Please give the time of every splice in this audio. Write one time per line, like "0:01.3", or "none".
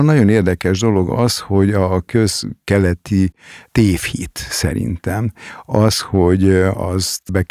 none